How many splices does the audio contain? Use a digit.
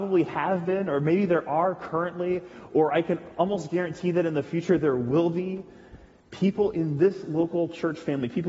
0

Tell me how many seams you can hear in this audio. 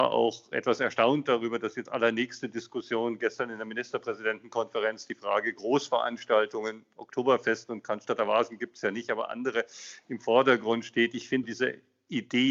2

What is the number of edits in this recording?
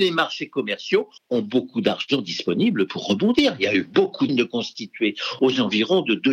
2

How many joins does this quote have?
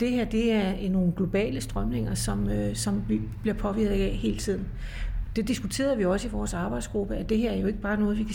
0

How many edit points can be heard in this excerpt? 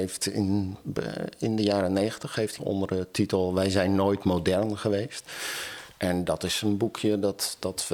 1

